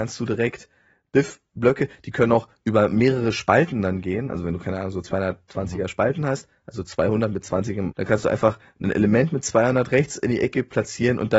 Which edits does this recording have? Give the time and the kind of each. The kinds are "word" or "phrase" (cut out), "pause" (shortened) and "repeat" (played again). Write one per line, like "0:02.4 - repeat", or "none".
0:07.9 - phrase